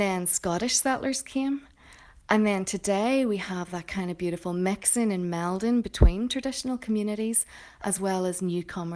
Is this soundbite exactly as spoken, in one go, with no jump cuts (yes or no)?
yes